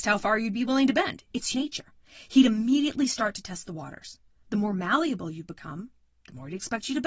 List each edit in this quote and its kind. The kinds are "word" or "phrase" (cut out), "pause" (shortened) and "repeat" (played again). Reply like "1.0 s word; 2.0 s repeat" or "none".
1.5 s word